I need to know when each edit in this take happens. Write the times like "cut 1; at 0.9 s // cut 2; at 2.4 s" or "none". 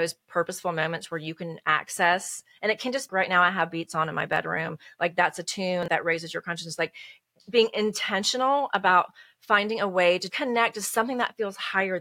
cut 1; at 3.1 s // cut 2; at 3.7 s // cut 3; at 5.9 s // cut 4; at 10.3 s